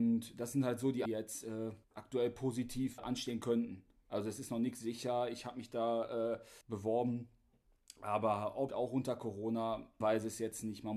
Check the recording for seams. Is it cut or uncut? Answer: cut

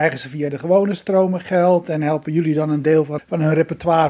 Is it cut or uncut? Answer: cut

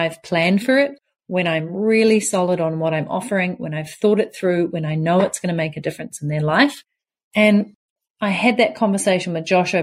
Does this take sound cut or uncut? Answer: uncut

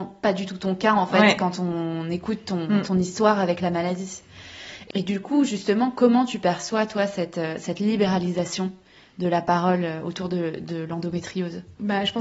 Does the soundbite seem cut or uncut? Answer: uncut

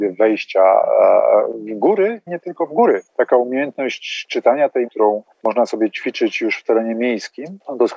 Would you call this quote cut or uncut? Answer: cut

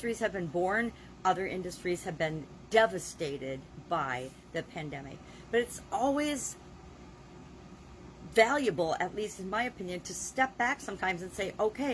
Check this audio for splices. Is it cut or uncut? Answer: uncut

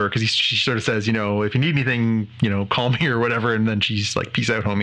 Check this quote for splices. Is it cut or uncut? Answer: uncut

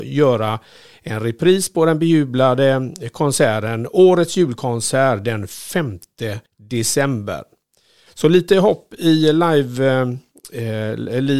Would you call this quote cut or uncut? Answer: cut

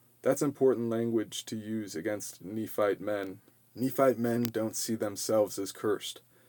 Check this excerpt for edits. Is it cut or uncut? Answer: uncut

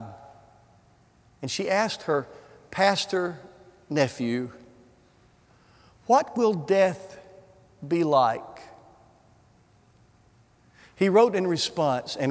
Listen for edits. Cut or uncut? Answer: uncut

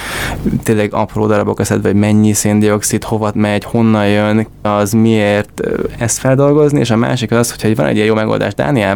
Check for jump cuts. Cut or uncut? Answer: cut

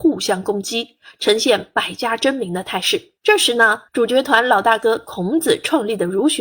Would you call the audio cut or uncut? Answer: cut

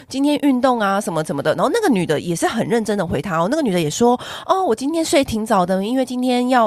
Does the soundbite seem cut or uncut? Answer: uncut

